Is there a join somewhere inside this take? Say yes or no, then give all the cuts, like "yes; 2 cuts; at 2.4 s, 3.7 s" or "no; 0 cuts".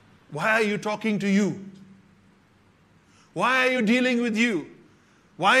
no; 0 cuts